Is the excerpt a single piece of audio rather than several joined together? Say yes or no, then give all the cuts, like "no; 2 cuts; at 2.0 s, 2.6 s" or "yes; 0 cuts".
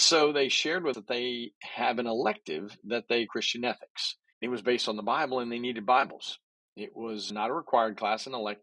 no; 4 cuts; at 0.9 s, 3.3 s, 4.3 s, 7.3 s